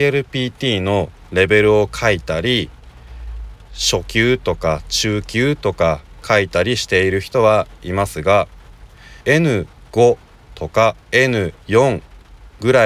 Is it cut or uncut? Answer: cut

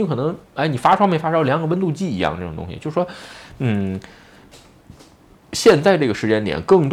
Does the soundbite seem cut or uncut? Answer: uncut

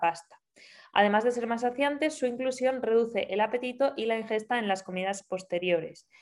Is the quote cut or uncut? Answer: uncut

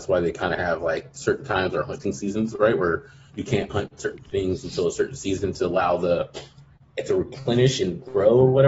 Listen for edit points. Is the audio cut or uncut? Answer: uncut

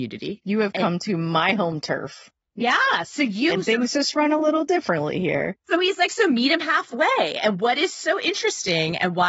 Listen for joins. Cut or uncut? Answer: uncut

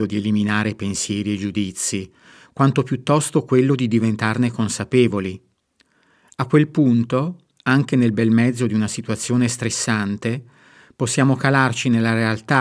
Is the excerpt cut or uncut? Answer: uncut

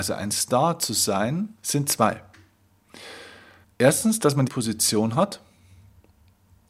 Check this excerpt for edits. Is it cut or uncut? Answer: cut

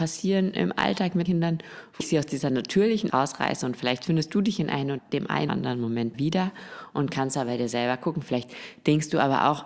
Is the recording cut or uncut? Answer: cut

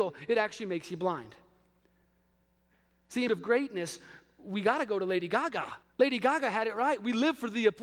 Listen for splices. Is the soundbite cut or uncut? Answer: cut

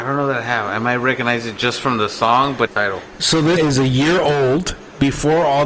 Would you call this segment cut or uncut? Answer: cut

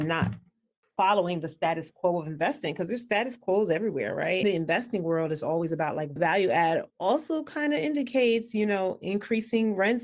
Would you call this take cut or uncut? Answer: cut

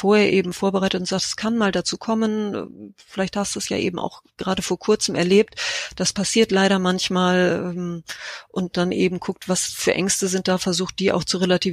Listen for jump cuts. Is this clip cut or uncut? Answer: uncut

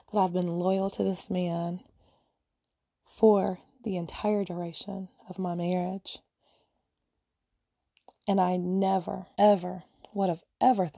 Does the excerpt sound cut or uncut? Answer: cut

